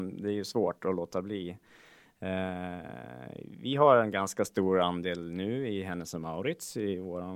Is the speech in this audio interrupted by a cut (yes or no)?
no